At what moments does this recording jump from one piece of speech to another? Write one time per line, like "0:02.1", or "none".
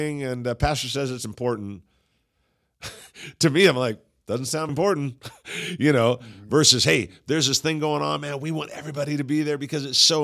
0:04.7

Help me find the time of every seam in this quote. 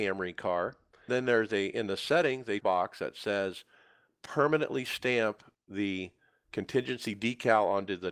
0:01.1
0:02.6

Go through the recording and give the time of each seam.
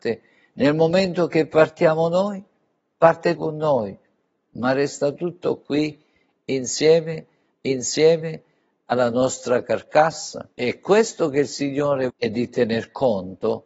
0:03.4
0:07.5
0:10.5
0:12.1

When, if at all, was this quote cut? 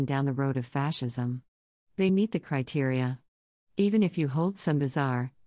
none

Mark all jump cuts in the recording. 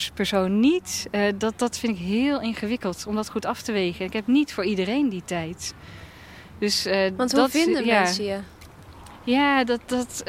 none

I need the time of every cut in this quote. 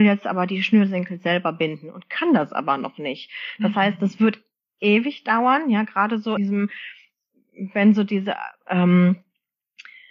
0:06.4

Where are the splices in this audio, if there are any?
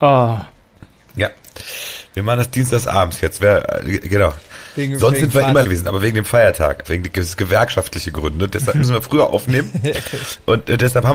0:03.4
0:05.6
0:06.8

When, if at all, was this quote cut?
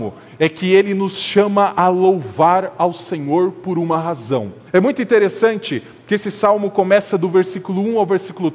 0:04.7

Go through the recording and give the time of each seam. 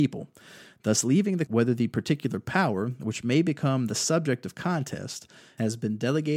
0:01.5

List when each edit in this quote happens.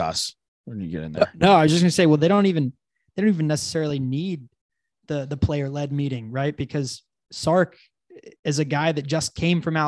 0:08.4

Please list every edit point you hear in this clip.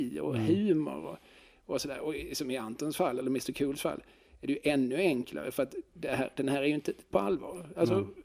0:07.1

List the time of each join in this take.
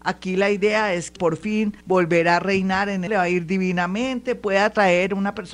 0:01.2
0:01.8
0:03.1

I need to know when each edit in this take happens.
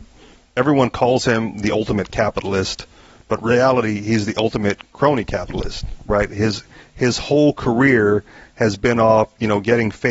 none

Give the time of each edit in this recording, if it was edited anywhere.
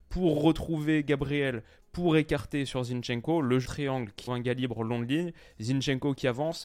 0:03.6
0:04.3

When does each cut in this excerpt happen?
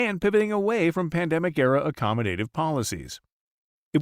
none

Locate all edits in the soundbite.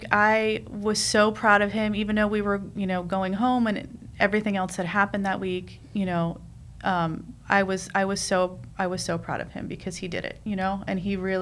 none

